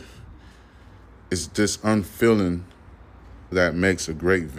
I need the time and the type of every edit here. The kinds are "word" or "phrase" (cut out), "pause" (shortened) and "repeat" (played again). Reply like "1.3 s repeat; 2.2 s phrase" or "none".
3.5 s word